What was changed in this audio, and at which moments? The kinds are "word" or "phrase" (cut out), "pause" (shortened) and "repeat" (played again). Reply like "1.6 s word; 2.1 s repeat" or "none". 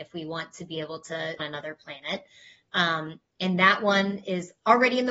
1.4 s phrase